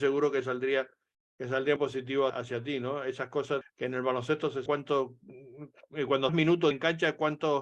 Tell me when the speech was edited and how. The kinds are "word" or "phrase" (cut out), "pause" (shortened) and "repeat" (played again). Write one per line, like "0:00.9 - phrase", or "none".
0:01.8 - word
0:02.3 - word
0:03.6 - word
0:04.7 - word
0:06.3 - word
0:06.7 - word